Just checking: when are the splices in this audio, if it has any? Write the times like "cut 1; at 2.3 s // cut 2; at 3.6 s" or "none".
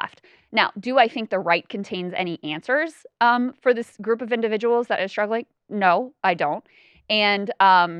none